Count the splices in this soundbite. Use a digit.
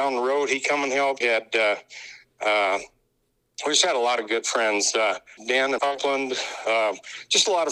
3